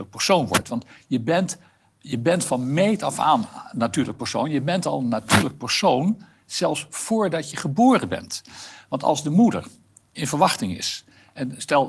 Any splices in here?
no; 0 cuts

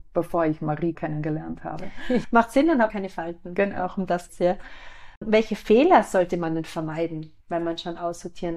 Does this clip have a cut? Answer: yes; 4 cuts; at 0.9 s, 2.2 s, 2.9 s, 4.3 s

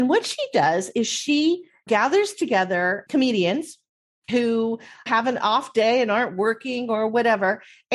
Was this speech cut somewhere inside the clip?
no; 0 cuts

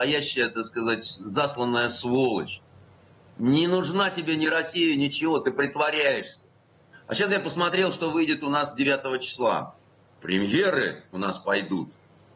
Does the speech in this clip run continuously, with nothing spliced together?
yes; 0 cuts

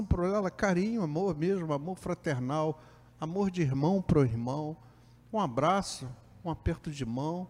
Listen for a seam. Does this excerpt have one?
no; 0 cuts

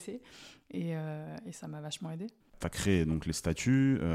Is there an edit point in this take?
yes; 1 cut; at 2.4 s

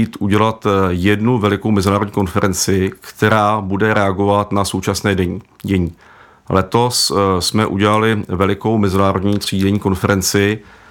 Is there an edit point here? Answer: no; 0 cuts

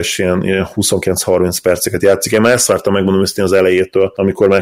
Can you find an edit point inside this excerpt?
no; 0 cuts

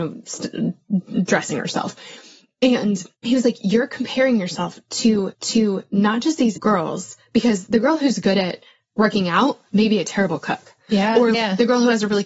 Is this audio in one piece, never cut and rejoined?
no; 4 cuts; at 3.1 s, 5.3 s, 6.6 s, 11.3 s

